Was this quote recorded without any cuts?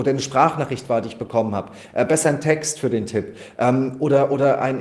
yes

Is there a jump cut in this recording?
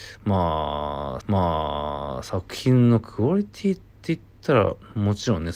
yes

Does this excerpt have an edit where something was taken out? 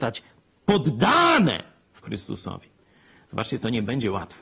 yes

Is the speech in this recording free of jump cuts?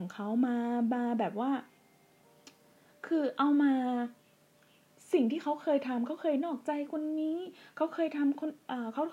yes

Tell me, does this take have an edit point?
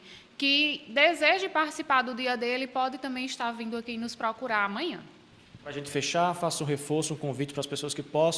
no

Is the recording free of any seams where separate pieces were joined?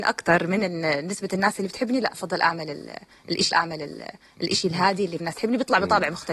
no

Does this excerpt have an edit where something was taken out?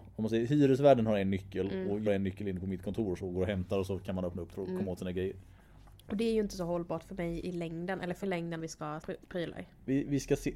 yes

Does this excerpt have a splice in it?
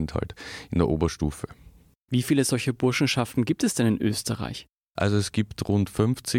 no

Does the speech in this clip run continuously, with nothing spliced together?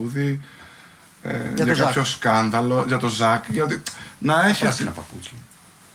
yes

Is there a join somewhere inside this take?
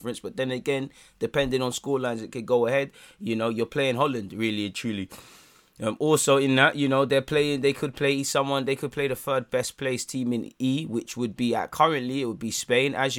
no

